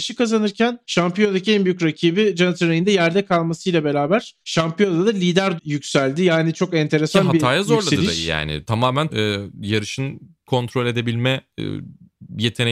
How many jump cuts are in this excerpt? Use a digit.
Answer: 3